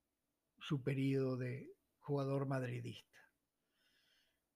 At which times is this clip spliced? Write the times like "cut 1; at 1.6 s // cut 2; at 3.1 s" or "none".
none